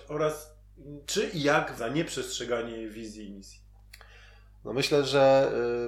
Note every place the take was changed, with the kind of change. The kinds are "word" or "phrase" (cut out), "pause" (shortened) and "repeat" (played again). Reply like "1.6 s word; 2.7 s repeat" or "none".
1.0 s word; 1.8 s phrase